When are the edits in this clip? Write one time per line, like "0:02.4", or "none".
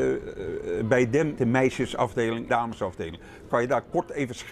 0:01.4
0:02.5